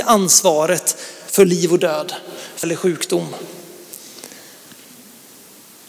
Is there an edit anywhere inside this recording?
yes; 1 cut; at 2.6 s

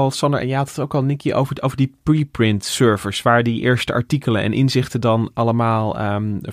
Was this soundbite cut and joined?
no; 0 cuts

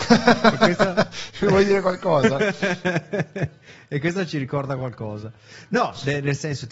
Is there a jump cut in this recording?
no; 0 cuts

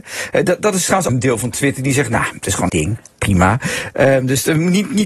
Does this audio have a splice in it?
yes; 2 cuts; at 1.1 s, 2.7 s

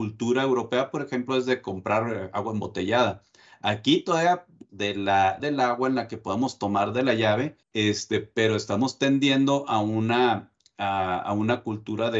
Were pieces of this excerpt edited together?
yes; 3 cuts; at 4.7 s, 5.4 s, 7.6 s

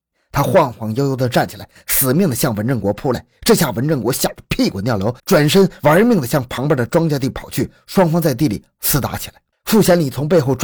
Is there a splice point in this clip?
yes; 2 cuts; at 5.2 s, 9.5 s

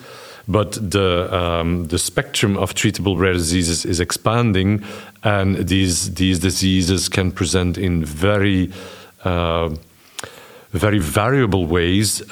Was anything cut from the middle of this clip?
no; 0 cuts

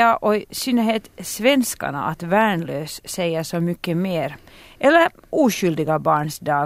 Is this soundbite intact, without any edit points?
yes; 0 cuts

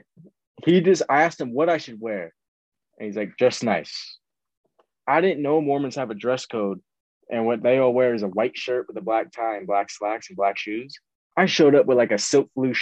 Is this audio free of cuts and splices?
yes; 0 cuts

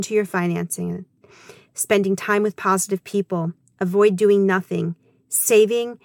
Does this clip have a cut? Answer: no; 0 cuts

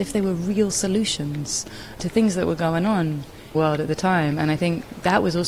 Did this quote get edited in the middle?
yes; 1 cut; at 3.5 s

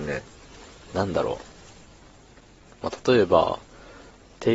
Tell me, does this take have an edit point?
no; 0 cuts

